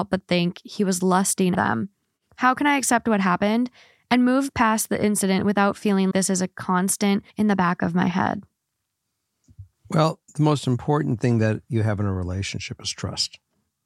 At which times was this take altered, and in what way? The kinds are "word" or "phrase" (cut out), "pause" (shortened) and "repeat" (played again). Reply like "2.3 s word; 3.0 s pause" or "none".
1.5 s word; 6.1 s word; 7.3 s pause; 10.3 s pause